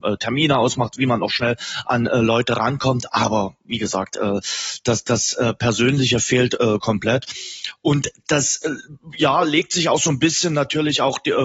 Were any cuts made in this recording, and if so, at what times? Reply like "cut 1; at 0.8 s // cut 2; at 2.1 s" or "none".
none